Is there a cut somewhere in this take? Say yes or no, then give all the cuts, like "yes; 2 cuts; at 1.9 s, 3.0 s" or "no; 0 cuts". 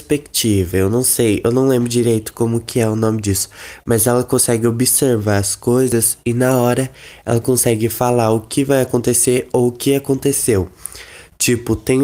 no; 0 cuts